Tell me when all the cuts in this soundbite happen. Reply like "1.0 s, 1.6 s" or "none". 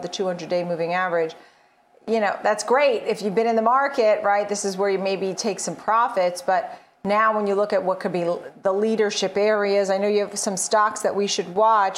none